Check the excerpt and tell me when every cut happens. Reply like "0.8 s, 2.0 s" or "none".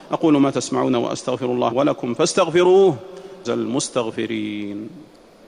1.7 s, 3.4 s